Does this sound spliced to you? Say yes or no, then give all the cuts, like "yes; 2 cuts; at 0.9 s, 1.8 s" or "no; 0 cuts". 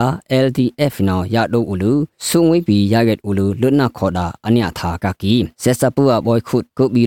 yes; 2 cuts; at 2.2 s, 5.5 s